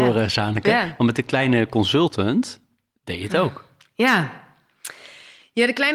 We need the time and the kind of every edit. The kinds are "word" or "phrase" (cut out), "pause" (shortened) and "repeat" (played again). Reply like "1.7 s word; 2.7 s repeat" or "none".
none